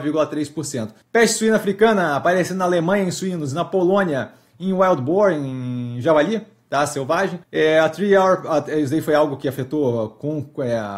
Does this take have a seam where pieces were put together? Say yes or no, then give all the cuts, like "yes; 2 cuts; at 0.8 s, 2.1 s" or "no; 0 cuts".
yes; 2 cuts; at 1.0 s, 7.4 s